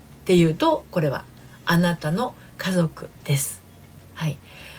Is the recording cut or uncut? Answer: cut